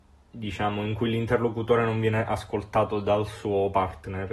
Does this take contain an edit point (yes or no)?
no